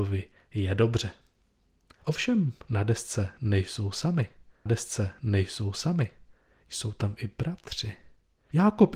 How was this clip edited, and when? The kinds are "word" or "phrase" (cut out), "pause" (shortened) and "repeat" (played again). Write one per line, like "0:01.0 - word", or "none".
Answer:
0:04.7 - repeat